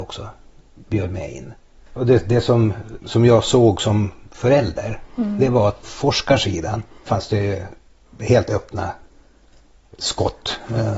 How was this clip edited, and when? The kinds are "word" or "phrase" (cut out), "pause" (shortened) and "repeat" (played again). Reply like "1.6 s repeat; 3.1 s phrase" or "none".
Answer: 3.0 s word; 5.8 s word; 7.1 s word

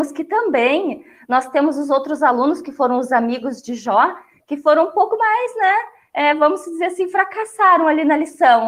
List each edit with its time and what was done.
none

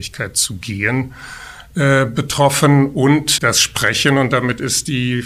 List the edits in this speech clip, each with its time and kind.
3.4 s word

